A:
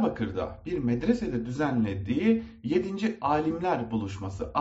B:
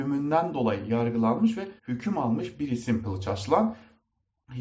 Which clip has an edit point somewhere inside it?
B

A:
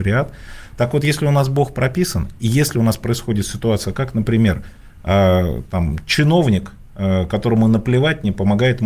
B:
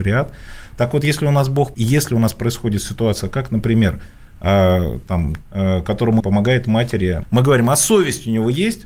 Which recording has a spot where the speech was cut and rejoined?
B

